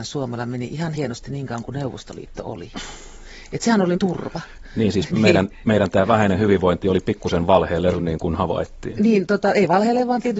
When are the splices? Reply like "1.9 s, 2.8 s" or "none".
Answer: 0.9 s, 3.9 s, 5.1 s, 7.9 s